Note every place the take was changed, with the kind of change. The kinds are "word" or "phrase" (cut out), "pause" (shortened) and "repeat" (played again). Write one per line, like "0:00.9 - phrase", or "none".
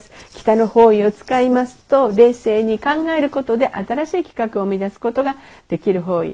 none